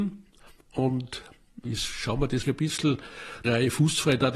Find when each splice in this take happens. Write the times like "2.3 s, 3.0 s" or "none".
1.6 s, 2.4 s, 3.4 s